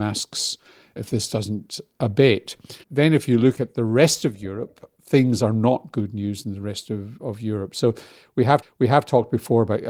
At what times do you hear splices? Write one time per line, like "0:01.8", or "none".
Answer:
0:02.8
0:08.6